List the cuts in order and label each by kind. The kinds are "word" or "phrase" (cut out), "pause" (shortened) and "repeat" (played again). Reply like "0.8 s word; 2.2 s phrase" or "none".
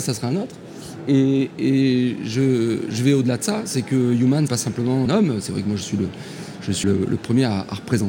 4.5 s word; 5.1 s phrase; 6.8 s word